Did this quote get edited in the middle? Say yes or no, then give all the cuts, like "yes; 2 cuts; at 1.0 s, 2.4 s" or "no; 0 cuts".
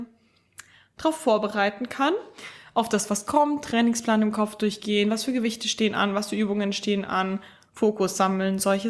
no; 0 cuts